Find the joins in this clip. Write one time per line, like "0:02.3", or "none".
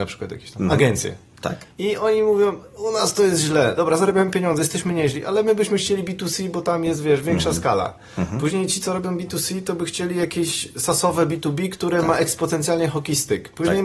0:01.7